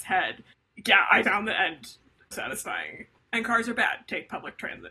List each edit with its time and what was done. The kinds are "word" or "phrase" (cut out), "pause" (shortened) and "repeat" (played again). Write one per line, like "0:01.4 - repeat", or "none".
0:01.2 - word
0:02.3 - word